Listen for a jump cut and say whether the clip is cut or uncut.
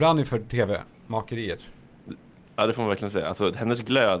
uncut